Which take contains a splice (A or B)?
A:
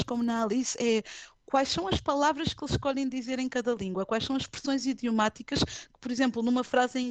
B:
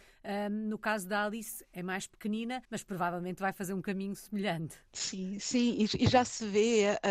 B